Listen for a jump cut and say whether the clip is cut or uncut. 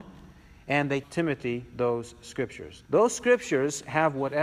cut